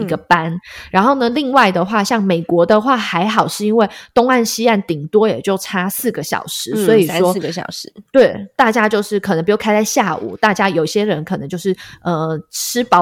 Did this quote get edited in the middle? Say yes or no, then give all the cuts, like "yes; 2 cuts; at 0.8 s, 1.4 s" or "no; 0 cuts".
no; 0 cuts